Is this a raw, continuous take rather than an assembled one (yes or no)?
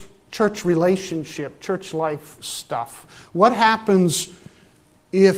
yes